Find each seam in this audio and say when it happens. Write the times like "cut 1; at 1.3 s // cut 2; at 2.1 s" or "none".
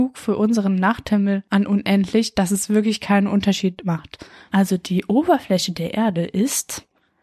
none